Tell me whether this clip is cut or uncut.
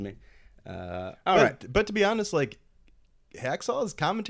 uncut